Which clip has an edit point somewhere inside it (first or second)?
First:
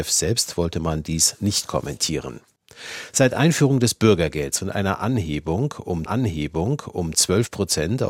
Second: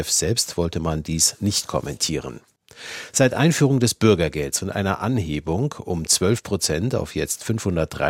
first